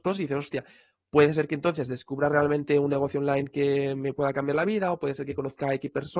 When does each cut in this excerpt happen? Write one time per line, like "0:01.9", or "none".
none